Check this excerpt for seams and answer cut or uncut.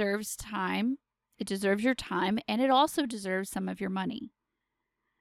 uncut